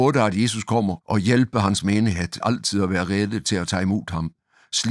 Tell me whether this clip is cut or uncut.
cut